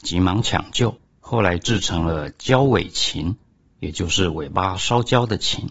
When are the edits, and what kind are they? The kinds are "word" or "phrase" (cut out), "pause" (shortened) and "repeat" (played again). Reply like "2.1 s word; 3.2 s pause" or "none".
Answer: 1.1 s pause